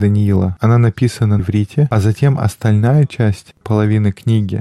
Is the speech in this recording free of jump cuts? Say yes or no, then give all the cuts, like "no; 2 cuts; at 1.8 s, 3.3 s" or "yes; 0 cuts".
no; 2 cuts; at 1.4 s, 3.6 s